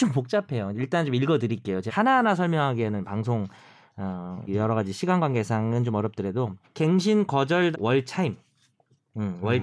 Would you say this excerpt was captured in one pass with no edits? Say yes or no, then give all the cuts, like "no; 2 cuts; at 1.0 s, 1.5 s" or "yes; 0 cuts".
no; 4 cuts; at 1.9 s, 4.5 s, 6.6 s, 7.7 s